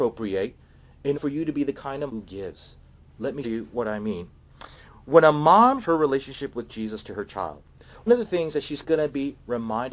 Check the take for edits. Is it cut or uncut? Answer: cut